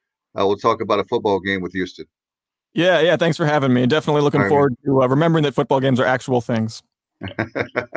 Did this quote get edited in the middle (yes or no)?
no